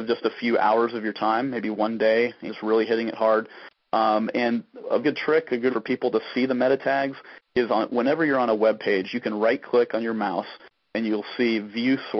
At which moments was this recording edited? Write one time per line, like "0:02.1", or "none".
0:02.5
0:05.0
0:05.7

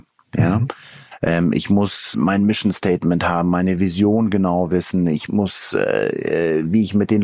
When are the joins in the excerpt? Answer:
0:02.1
0:05.3

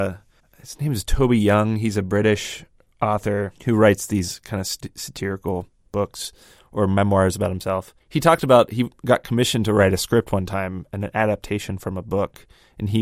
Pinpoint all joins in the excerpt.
0:03.6

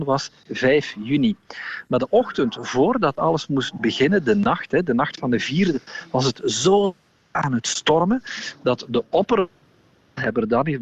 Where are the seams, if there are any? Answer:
none

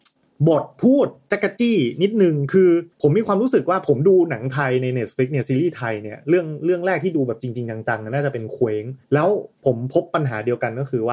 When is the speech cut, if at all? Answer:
0:02.9
0:09.0
0:09.5

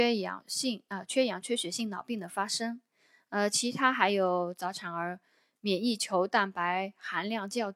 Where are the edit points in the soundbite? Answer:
none

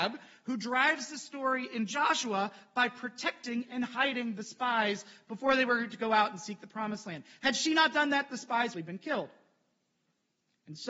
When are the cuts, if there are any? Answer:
0:08.7

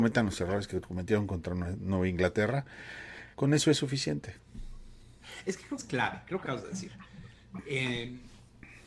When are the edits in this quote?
0:03.3
0:05.8
0:06.4

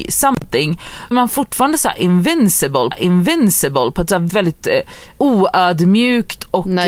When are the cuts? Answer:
0:01.1
0:02.9
0:04.3
0:05.1

